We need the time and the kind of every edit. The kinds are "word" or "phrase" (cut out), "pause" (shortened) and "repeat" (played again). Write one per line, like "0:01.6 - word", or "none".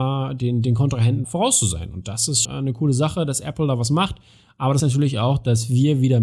0:01.2 - word
0:02.4 - word
0:04.8 - word